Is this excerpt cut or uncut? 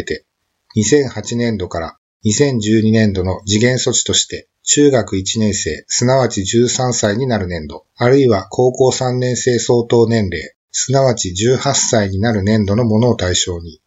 cut